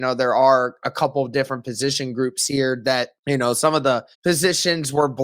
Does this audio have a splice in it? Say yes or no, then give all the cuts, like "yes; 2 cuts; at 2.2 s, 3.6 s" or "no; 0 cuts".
yes; 2 cuts; at 3.2 s, 4.1 s